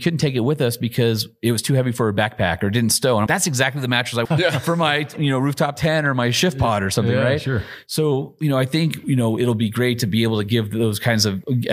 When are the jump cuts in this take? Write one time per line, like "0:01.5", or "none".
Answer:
0:03.3
0:04.2